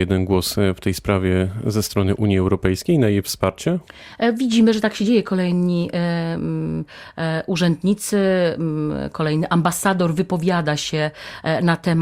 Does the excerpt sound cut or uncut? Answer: uncut